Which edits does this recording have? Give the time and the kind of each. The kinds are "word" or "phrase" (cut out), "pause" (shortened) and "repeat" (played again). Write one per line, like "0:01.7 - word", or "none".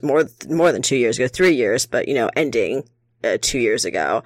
none